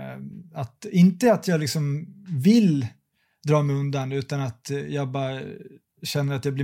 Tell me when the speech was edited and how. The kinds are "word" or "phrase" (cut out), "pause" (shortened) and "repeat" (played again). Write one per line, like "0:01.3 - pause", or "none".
none